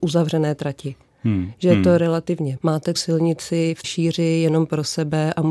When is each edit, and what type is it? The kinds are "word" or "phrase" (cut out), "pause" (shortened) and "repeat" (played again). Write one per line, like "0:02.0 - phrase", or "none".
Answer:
0:02.6 - word
0:03.0 - word
0:03.8 - word